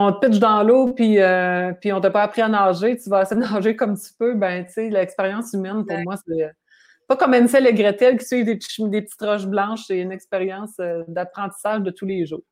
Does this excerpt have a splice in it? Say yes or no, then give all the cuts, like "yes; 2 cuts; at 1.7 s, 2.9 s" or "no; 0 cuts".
no; 0 cuts